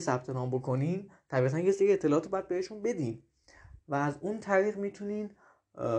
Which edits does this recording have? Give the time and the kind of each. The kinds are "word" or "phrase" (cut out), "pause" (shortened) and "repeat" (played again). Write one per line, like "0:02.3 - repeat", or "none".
none